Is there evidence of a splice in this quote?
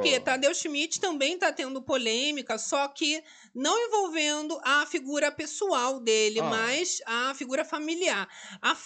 no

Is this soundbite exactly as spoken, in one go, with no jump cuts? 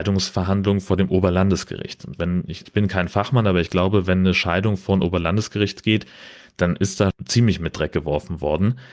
no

